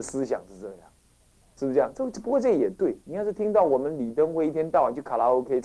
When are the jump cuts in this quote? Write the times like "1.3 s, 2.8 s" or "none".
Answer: 3.0 s